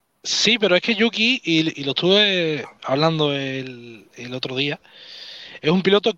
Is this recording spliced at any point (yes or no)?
no